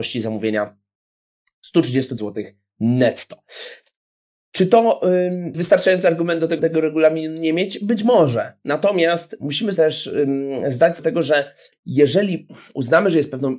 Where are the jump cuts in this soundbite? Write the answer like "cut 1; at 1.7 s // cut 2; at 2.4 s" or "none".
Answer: cut 1; at 2.2 s // cut 2; at 5.5 s // cut 3; at 6.6 s // cut 4; at 9.8 s // cut 5; at 11.0 s // cut 6; at 11.7 s